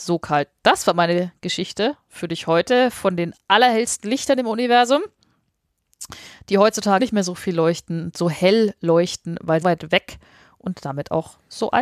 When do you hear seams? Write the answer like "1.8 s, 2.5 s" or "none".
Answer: 7.0 s, 9.6 s